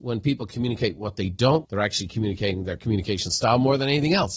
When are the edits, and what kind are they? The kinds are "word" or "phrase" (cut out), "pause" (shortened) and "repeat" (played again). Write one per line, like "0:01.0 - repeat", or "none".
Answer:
0:01.6 - word